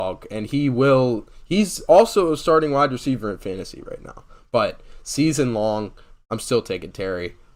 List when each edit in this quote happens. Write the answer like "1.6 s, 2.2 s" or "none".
none